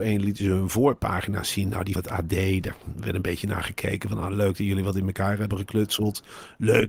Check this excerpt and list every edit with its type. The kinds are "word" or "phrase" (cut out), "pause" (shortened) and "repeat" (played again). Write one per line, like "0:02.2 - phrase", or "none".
0:02.0 - word